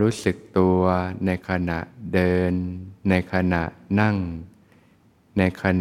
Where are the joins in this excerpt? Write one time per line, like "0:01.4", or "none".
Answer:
0:03.0